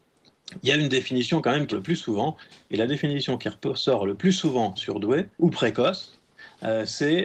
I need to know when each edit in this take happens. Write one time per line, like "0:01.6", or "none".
0:01.7
0:04.8
0:05.3